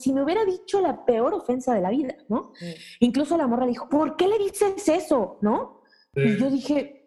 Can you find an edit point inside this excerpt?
yes; 1 cut; at 3.9 s

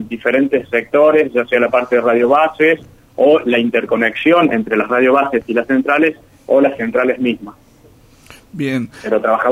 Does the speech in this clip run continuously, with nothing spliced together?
yes; 0 cuts

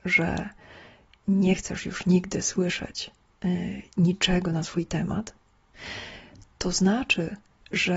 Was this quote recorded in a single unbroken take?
yes; 0 cuts

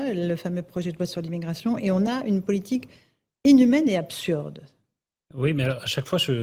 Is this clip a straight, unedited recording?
yes; 0 cuts

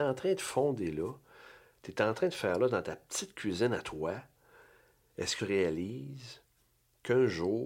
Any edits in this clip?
yes; 1 cut; at 5.4 s

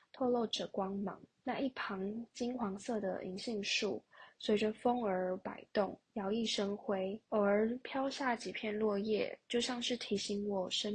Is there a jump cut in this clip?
yes; 3 cuts; at 1.3 s, 6.0 s, 7.3 s

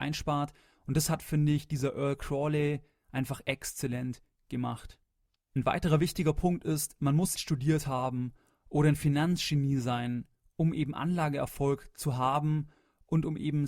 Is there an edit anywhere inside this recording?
yes; 1 cut; at 7.4 s

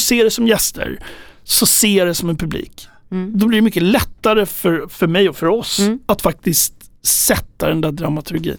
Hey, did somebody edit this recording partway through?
no; 0 cuts

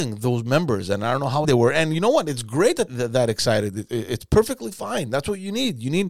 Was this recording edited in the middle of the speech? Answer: yes; 2 cuts; at 1.4 s, 2.9 s

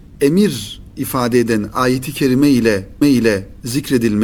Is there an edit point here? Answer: yes; 1 cut; at 3.0 s

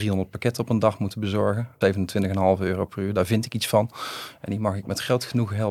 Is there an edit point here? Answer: yes; 1 cut; at 1.8 s

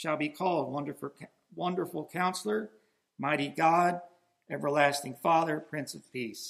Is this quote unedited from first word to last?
yes; 0 cuts

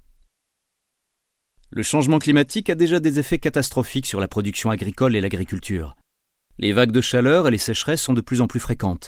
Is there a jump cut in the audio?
no; 0 cuts

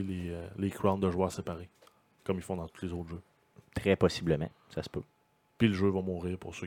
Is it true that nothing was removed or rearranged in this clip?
yes; 0 cuts

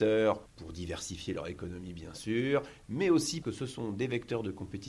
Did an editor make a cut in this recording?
yes; 1 cut; at 3.4 s

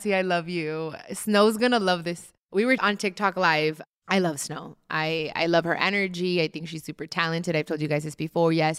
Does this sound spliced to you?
yes; 1 cut; at 2.8 s

